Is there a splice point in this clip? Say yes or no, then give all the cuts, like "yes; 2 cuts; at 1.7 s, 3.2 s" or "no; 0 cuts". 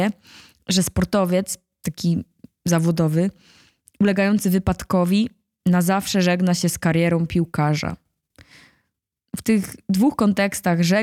no; 0 cuts